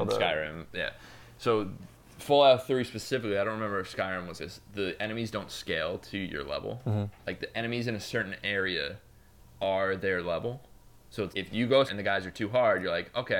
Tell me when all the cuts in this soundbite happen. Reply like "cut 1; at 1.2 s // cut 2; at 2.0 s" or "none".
cut 1; at 4.4 s // cut 2; at 11.3 s // cut 3; at 11.9 s